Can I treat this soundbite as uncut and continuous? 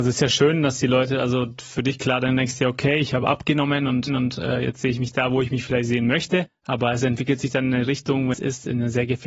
no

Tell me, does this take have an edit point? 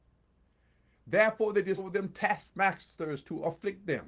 yes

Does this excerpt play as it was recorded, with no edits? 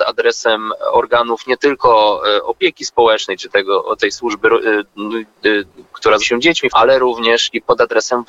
no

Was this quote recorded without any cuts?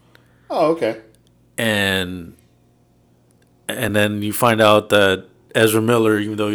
yes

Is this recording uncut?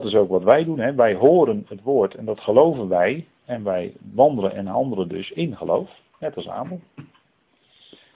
no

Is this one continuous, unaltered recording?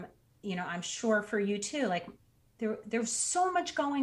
yes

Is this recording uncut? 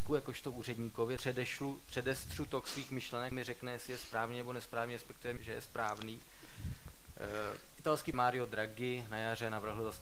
no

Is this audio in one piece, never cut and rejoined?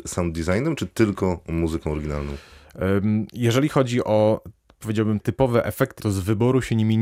no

